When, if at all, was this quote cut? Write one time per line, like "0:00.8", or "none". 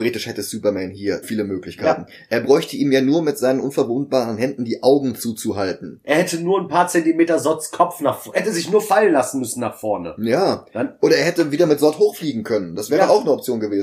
0:01.2
0:08.3

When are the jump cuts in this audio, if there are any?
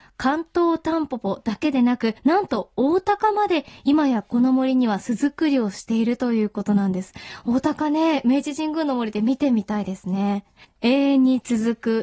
0:02.2
0:10.6

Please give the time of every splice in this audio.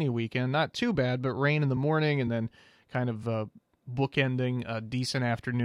none

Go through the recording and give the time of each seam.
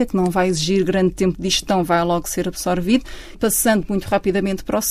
0:03.3

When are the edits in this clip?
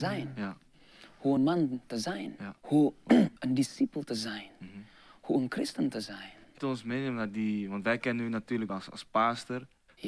0:01.4
0:02.6
0:03.4
0:06.6
0:08.7

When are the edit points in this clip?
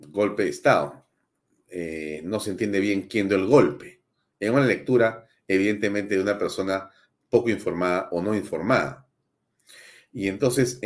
none

